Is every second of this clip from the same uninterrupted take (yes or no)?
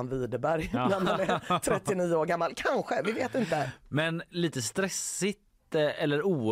yes